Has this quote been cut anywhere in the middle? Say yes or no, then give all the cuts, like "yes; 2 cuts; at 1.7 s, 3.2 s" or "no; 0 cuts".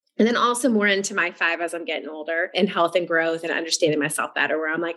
no; 0 cuts